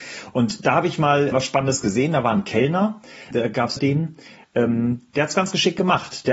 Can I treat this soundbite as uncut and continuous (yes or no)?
no